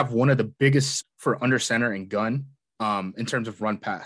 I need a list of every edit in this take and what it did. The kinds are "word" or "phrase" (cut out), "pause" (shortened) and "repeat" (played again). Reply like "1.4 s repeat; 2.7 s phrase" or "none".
1.0 s word